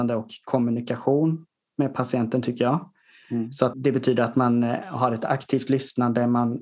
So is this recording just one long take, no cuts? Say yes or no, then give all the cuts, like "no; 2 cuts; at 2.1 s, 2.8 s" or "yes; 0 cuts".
no; 1 cut; at 3.7 s